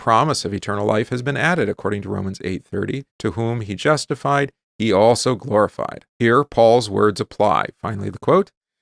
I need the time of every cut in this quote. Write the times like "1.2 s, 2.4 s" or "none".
3.1 s, 6.1 s